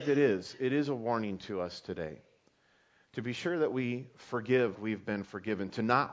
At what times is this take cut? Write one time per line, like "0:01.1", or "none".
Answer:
0:04.7